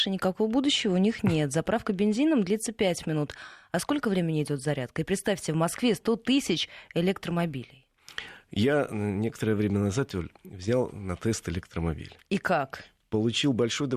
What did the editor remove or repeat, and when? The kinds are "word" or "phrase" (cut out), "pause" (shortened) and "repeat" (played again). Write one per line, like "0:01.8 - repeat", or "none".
none